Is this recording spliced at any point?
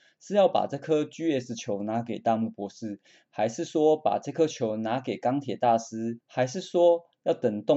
yes; 1 cut; at 6.2 s

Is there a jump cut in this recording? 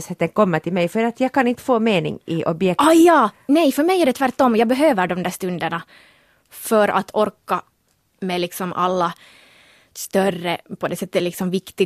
no; 0 cuts

